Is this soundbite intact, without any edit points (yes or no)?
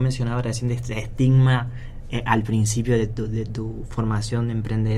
yes